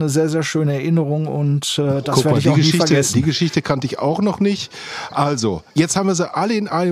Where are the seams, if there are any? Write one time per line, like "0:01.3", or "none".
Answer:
0:05.7